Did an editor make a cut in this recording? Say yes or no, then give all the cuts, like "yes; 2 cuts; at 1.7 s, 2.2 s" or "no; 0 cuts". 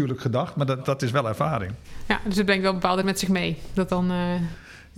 yes; 2 cuts; at 3.0 s, 3.9 s